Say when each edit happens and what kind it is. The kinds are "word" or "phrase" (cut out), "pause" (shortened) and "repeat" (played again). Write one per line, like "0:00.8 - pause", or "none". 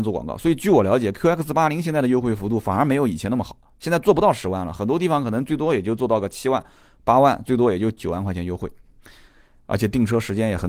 none